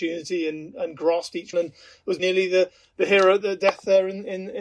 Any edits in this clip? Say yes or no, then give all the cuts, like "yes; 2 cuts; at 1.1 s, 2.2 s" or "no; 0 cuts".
yes; 3 cuts; at 1.5 s, 2.2 s, 3.4 s